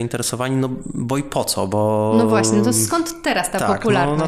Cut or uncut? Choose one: uncut